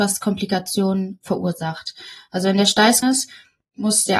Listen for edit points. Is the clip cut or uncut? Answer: cut